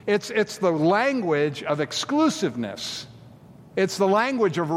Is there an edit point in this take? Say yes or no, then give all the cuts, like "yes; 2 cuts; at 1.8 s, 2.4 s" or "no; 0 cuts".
no; 0 cuts